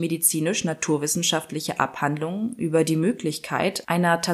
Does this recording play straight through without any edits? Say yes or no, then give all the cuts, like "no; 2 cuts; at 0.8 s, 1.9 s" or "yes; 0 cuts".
yes; 0 cuts